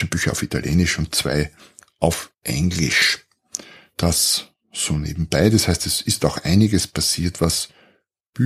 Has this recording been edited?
no; 0 cuts

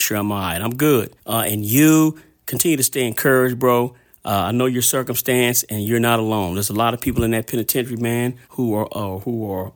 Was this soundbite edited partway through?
yes; 2 cuts; at 1.2 s, 8.4 s

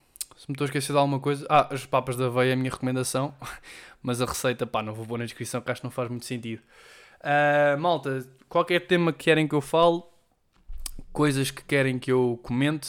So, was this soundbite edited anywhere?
no; 0 cuts

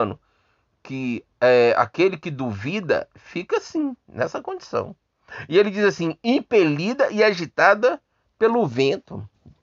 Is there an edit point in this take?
no; 0 cuts

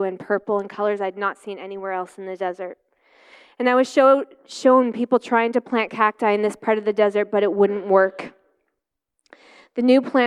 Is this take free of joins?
yes; 0 cuts

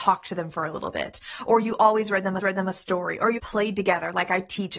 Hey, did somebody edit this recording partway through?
yes; 2 cuts; at 2.4 s, 3.4 s

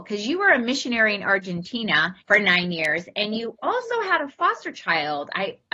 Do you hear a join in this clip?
yes; 1 cut; at 2.2 s

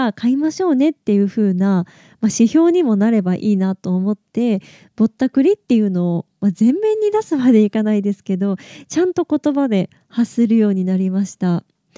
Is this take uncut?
yes; 0 cuts

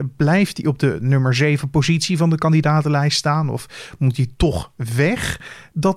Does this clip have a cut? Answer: no; 0 cuts

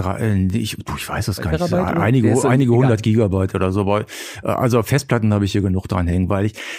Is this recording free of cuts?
yes; 0 cuts

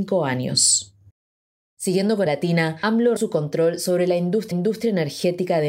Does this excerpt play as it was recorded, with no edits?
no; 3 cuts; at 2.3 s, 3.2 s, 4.5 s

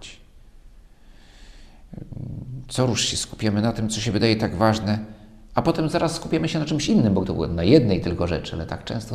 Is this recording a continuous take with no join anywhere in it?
no; 1 cut; at 7.2 s

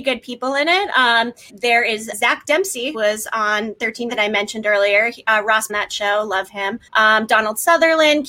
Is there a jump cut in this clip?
yes; 6 cuts; at 1.5 s, 2.1 s, 2.9 s, 4.1 s, 5.7 s, 6.9 s

